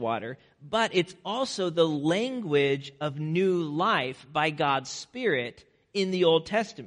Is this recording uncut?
yes; 0 cuts

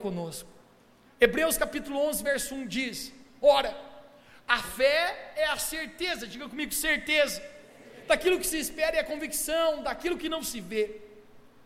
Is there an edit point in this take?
no; 0 cuts

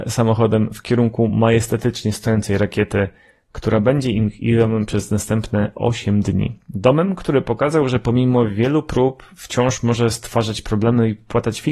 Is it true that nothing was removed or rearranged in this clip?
yes; 0 cuts

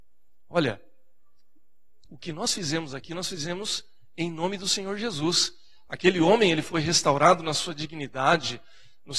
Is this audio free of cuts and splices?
yes; 0 cuts

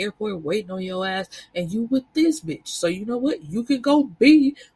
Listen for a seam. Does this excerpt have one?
no; 0 cuts

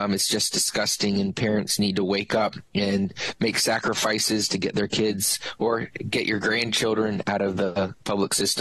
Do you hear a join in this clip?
no; 0 cuts

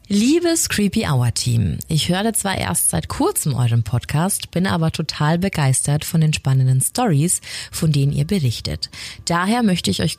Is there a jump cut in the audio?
no; 0 cuts

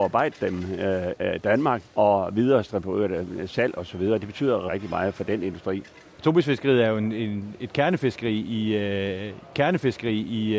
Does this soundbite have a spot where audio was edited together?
yes; 4 cuts; at 1.2 s, 1.9 s, 4.7 s, 9.5 s

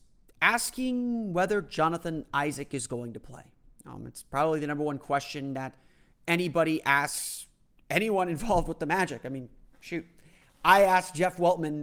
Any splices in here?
no; 0 cuts

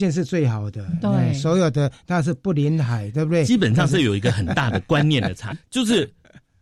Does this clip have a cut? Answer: yes; 1 cut; at 5.5 s

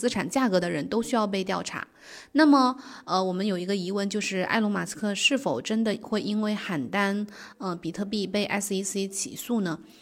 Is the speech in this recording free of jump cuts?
yes; 0 cuts

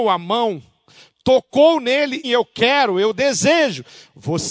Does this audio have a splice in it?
yes; 1 cut; at 2.2 s

